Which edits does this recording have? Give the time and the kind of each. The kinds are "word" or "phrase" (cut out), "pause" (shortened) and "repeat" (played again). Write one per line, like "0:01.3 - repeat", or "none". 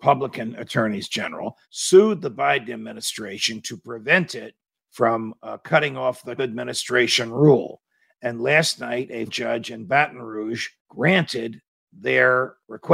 0:01.6 - pause
0:04.8 - pause
0:06.4 - word
0:09.3 - word
0:10.8 - pause